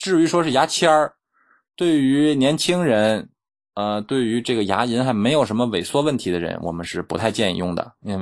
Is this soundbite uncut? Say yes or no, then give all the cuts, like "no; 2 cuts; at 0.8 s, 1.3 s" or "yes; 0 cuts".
yes; 0 cuts